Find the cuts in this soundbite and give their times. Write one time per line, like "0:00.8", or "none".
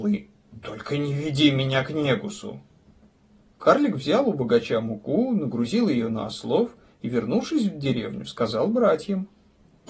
none